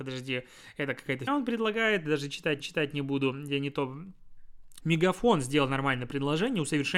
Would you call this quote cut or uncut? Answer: cut